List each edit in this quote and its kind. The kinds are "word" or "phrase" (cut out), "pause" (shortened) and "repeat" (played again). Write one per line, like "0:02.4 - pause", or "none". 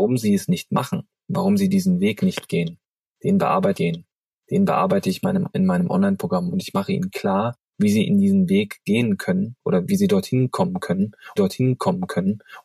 0:03.7 - repeat
0:07.7 - pause
0:09.6 - pause
0:11.4 - repeat

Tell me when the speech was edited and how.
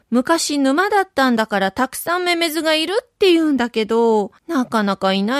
0:04.4 - pause

